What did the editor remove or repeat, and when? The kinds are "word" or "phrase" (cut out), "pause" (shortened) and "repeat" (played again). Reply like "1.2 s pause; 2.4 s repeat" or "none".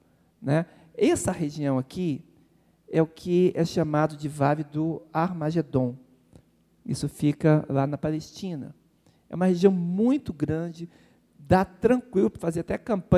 none